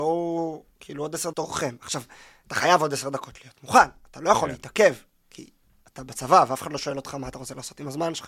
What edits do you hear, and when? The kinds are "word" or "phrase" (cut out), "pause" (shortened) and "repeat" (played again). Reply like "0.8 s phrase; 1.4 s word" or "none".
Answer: 1.3 s word